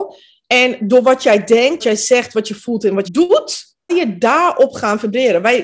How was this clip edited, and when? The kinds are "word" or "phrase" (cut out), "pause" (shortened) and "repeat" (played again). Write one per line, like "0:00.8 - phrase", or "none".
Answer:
0:01.8 - word
0:03.0 - word
0:03.9 - word